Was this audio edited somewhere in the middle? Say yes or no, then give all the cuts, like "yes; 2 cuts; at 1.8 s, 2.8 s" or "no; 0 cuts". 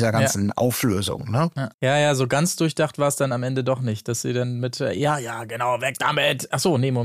yes; 1 cut; at 1.7 s